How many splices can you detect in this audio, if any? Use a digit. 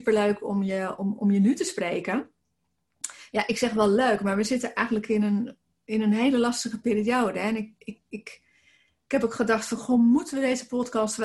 0